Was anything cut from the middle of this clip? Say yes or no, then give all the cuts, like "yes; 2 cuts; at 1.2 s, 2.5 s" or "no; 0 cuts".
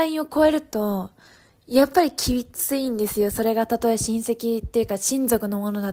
no; 0 cuts